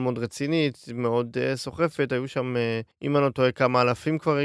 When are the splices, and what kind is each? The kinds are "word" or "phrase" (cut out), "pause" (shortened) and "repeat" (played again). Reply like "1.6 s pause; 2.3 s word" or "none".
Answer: 2.9 s pause